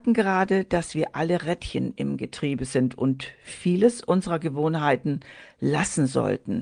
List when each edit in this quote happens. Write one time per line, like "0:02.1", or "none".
none